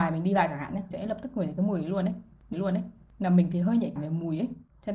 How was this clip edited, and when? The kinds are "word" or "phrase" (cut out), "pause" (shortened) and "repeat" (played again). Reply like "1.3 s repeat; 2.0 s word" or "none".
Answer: 0.9 s word; 2.5 s repeat; 4.0 s word